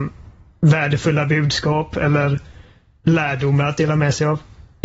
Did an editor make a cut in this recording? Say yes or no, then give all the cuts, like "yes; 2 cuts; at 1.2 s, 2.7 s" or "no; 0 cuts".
no; 0 cuts